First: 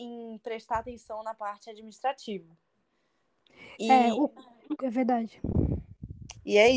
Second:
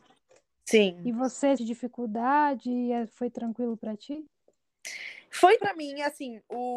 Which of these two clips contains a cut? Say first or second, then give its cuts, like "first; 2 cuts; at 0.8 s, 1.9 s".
second; 2 cuts; at 1.6 s, 5.6 s